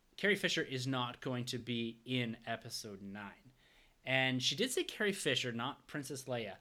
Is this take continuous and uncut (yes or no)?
yes